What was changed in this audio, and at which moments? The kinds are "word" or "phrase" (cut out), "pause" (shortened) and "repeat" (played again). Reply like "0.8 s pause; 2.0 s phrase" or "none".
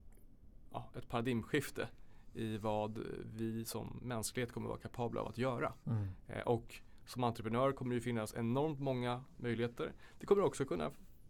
none